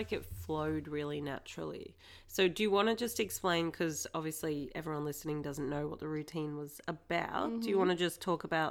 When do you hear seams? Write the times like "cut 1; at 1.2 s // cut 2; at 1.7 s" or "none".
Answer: none